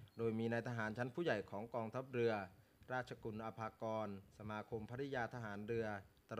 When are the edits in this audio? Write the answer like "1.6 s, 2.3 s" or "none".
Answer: 4.3 s